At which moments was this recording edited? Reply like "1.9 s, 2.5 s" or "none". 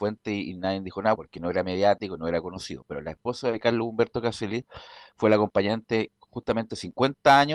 1.2 s